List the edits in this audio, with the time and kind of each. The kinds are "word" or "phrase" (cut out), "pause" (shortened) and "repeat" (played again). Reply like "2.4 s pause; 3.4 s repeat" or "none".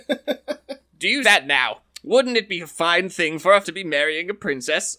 1.2 s word; 3.6 s word